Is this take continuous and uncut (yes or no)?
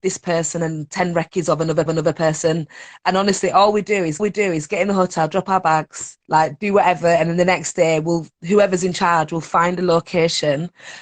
no